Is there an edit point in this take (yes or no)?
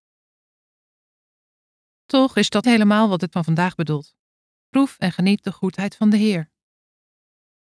yes